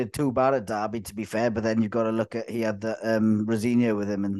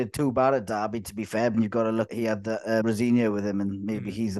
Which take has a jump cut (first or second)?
second